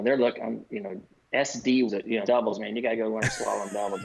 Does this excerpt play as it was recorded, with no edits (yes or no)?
no